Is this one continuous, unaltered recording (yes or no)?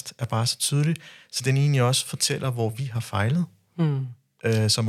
yes